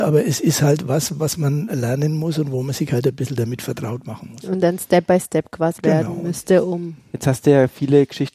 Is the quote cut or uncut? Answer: cut